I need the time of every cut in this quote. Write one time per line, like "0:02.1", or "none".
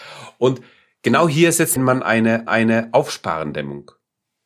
0:01.8
0:02.5